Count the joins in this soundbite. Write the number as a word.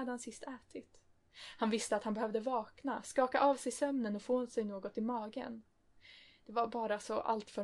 zero